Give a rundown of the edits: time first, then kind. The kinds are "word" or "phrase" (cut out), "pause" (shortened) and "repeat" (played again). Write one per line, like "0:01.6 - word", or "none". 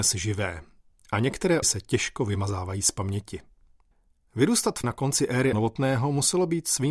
0:01.6 - word
0:03.9 - pause
0:04.8 - word
0:05.5 - word

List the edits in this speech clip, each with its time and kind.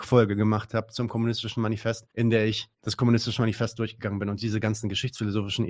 0:02.1 - pause
0:02.7 - pause

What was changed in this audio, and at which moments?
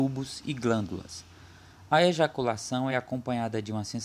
none

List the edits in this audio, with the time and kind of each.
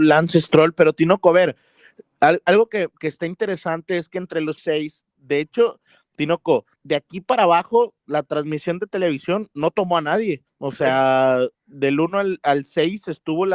0:04.6 - word
0:06.8 - pause
0:10.5 - pause
0:11.5 - pause

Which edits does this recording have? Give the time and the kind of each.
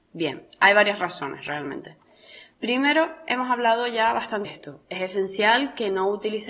0:04.4 - word

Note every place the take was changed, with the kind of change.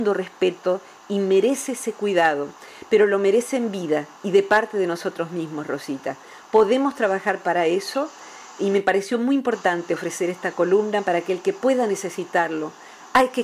none

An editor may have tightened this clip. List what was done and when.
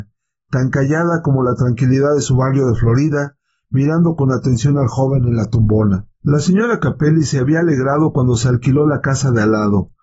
0:06.1 - pause

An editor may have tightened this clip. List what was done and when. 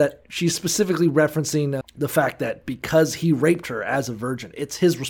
0:01.8 - word

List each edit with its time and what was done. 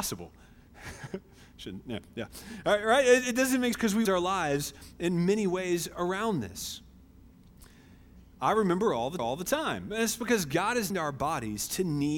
0:03.7 - word
0:04.1 - word
0:09.2 - repeat
0:10.9 - word

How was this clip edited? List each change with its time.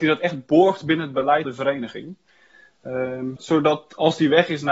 0:01.5 - word
0:03.4 - word

